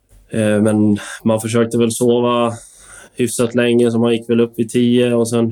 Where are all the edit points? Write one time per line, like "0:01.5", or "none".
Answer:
0:03.1